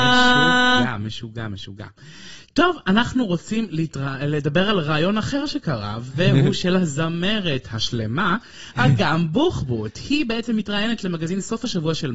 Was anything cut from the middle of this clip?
no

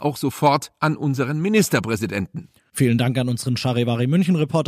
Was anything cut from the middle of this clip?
no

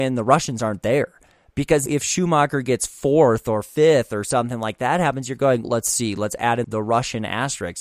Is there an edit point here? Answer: yes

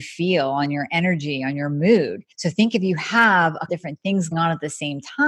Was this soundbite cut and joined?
yes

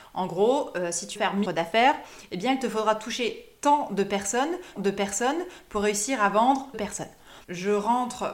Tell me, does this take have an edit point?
yes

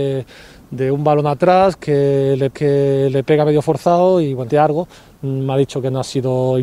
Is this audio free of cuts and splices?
no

